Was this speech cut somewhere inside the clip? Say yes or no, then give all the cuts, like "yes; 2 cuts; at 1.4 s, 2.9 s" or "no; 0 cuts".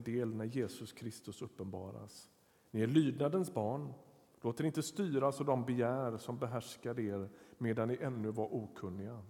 no; 0 cuts